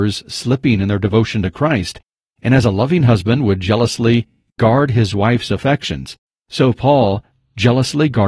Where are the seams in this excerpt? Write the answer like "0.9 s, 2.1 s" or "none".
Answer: none